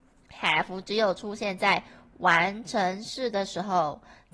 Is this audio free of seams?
yes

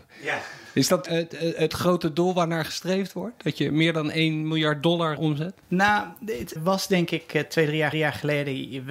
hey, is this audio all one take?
no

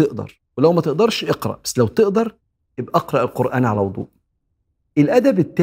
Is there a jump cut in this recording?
no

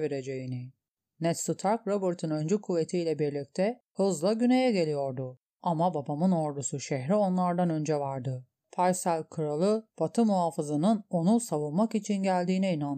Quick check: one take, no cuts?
yes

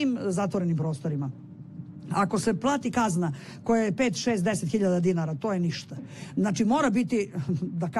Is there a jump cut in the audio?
no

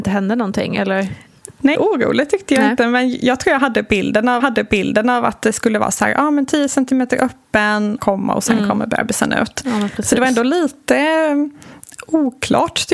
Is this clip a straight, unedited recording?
no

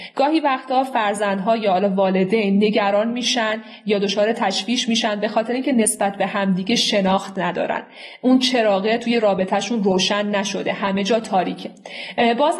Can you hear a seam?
no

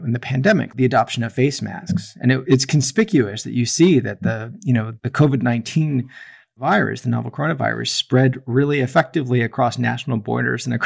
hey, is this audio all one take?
yes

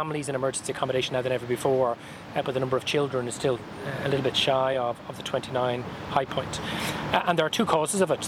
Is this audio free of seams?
yes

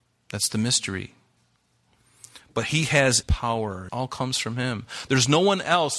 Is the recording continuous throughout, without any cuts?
no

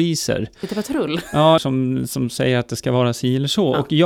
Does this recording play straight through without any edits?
no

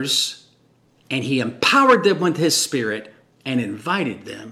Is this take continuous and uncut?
yes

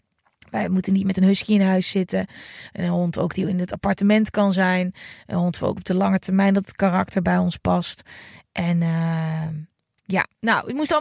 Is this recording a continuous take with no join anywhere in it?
yes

